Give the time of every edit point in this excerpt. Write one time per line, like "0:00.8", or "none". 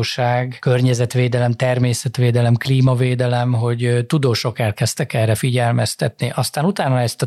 none